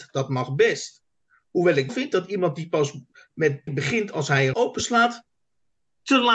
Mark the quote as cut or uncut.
cut